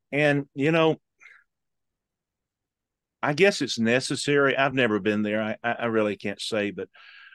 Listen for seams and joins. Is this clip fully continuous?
yes; 0 cuts

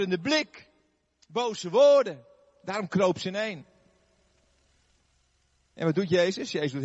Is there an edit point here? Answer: no; 0 cuts

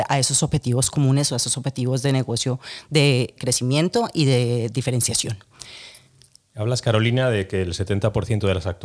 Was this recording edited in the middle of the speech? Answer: yes; 1 cut; at 3.4 s

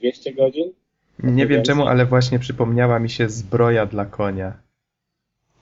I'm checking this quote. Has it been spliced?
no; 0 cuts

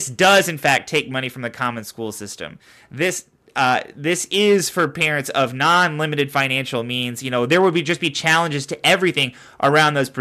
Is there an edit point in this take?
no; 0 cuts

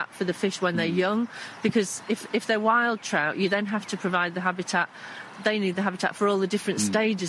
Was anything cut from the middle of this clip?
no; 0 cuts

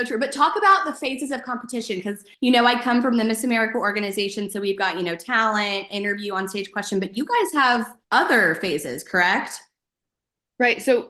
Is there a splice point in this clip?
yes; 2 cuts; at 2.3 s, 8.0 s

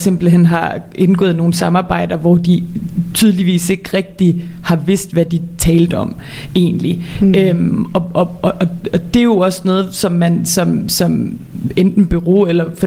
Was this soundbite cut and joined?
no; 0 cuts

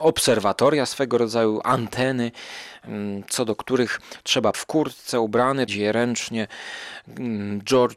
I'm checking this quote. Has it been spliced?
yes; 2 cuts; at 4.5 s, 5.7 s

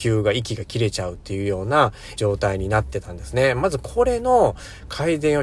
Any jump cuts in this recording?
yes; 1 cut; at 2.2 s

